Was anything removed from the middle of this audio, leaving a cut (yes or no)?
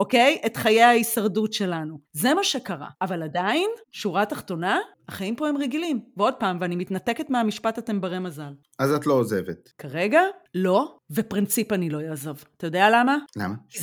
yes